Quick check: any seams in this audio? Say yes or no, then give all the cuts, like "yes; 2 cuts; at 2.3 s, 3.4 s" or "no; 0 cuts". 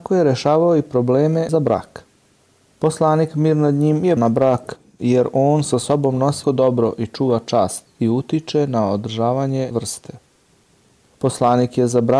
yes; 4 cuts; at 1.5 s, 4.2 s, 6.4 s, 9.7 s